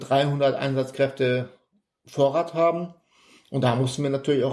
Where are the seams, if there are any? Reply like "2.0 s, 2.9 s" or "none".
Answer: none